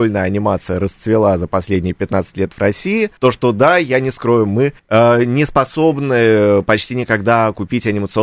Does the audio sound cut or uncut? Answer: cut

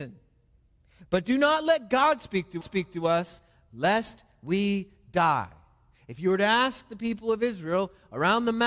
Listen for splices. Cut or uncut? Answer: cut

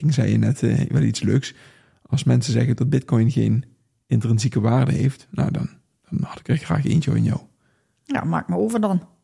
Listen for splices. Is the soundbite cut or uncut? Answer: uncut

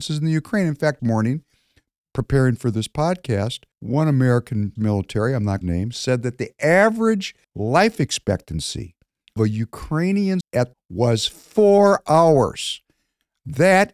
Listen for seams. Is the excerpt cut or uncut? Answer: cut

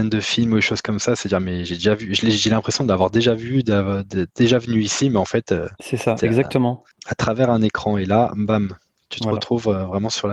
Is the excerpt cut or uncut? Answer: uncut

